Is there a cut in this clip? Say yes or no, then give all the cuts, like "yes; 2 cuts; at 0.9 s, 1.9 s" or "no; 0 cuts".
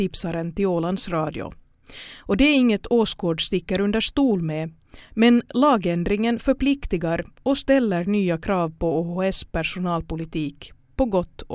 no; 0 cuts